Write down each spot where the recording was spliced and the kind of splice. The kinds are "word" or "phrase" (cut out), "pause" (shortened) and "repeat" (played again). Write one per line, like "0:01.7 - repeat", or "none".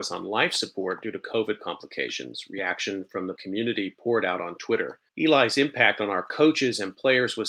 0:03.4 - word
0:05.1 - pause

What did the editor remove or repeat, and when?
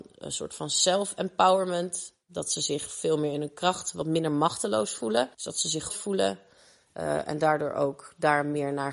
0:05.3 - pause
0:05.9 - word

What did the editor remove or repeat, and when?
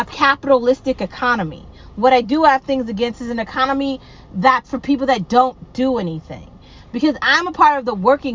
0:04.6 - word

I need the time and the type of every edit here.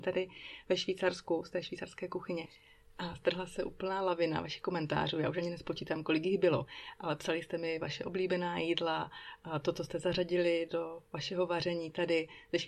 none

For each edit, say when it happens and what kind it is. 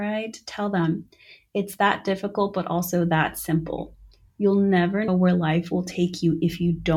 0:05.1 - word

